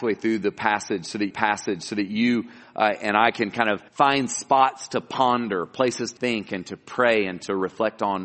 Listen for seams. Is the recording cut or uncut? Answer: cut